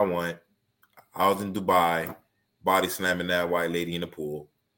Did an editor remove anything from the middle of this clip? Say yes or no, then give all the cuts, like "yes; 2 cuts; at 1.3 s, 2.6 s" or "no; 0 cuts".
no; 0 cuts